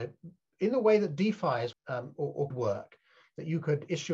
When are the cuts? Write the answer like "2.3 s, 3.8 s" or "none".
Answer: 1.7 s, 2.2 s, 2.5 s